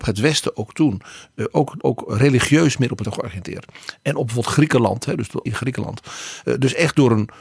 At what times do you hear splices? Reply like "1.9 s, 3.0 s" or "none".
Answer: 1.8 s, 3.0 s, 5.5 s